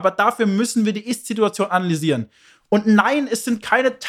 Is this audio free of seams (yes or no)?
yes